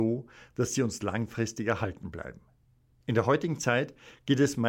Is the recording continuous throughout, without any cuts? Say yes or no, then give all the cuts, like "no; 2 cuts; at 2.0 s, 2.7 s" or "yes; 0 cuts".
yes; 0 cuts